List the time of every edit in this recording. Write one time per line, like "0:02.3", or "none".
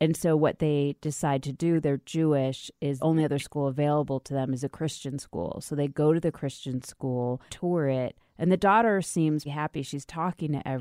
0:03.0
0:07.5
0:09.5